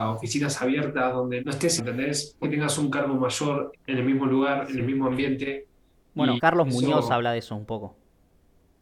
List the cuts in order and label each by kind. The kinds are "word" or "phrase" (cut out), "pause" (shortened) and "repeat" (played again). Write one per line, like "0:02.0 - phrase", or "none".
0:01.4 - word
0:01.8 - word
0:02.4 - word
0:03.7 - word
0:06.4 - word